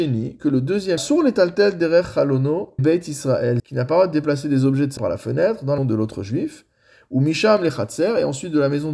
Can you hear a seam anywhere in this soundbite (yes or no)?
yes